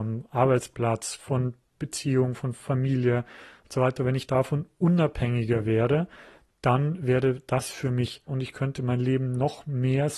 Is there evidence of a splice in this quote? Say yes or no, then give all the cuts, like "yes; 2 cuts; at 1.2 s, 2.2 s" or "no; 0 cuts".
yes; 1 cut; at 8.3 s